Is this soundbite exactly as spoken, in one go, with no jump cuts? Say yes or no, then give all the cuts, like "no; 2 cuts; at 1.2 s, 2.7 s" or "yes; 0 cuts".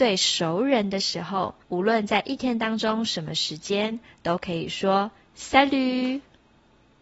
no; 1 cut; at 1.6 s